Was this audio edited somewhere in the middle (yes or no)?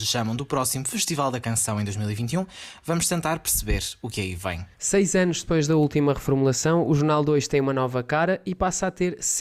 yes